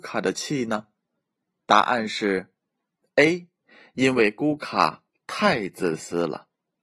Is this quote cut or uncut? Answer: uncut